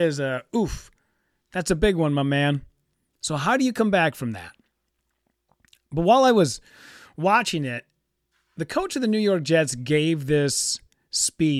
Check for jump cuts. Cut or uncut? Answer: uncut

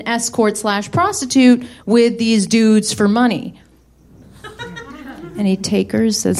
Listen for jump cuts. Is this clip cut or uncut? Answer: uncut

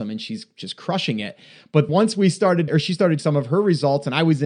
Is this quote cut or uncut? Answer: cut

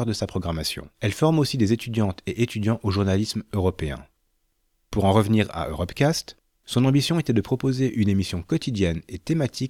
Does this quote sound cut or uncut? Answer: cut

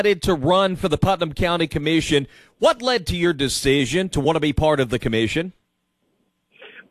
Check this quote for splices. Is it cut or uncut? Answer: uncut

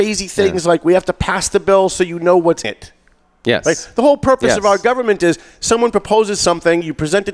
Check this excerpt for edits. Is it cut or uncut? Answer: cut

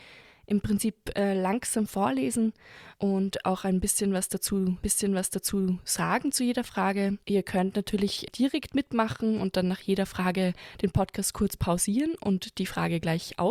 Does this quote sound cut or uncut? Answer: cut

